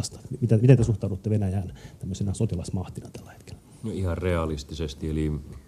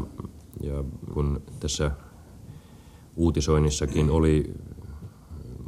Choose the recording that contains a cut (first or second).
second